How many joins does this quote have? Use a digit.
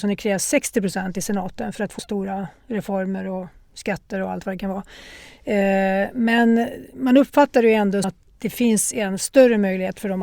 2